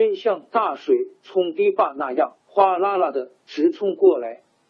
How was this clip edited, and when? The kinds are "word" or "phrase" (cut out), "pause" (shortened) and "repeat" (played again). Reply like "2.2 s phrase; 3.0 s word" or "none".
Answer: 2.4 s pause